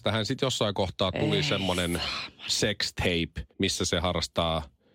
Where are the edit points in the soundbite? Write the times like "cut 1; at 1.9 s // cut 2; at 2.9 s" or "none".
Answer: cut 1; at 3.5 s